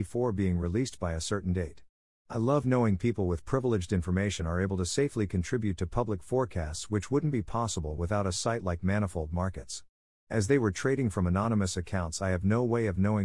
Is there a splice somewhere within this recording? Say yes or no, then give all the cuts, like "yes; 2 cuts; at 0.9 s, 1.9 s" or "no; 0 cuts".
no; 0 cuts